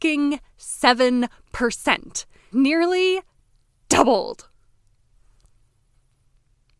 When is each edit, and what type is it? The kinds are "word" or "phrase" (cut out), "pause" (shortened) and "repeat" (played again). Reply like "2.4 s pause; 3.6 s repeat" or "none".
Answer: 2.5 s word